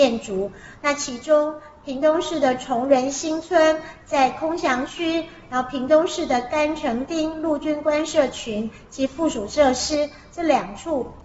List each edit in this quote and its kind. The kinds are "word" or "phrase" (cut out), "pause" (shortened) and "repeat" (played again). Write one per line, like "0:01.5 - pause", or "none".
none

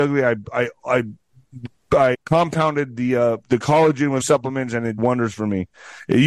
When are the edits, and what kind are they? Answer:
0:02.1 - word
0:03.4 - word
0:04.2 - word
0:05.0 - word

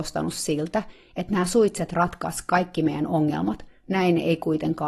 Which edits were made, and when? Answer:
none

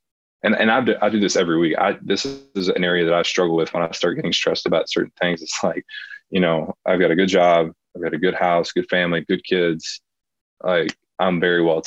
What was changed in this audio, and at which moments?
none

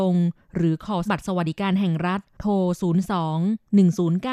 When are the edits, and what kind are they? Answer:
0:01.1 - word

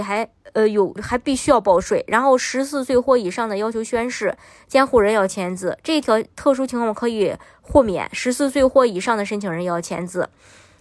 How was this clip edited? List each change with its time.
0:01.0 - word

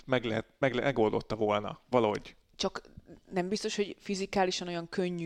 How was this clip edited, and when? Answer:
none

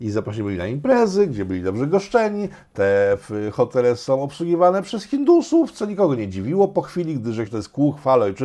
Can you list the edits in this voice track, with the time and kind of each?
0:07.5 - phrase

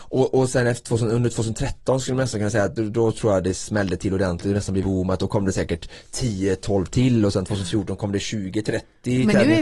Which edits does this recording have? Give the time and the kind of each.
0:02.8 - word
0:04.8 - word

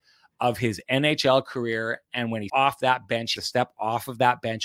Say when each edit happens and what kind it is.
0:02.5 - word
0:03.4 - word

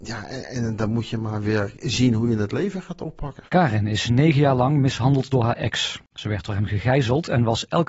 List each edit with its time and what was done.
0:03.5 - pause
0:06.1 - pause

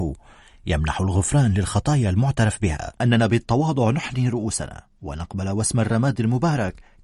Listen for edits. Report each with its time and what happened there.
0:03.0 - word

